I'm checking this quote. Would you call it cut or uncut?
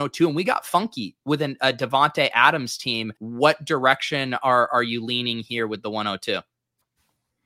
cut